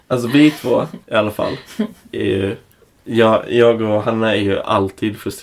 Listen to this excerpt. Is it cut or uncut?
cut